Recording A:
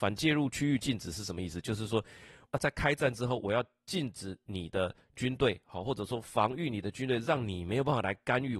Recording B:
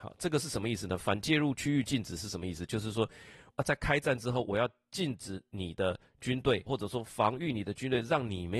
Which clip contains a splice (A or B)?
B